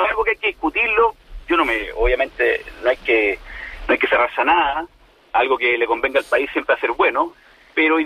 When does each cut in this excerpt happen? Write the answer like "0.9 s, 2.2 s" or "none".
none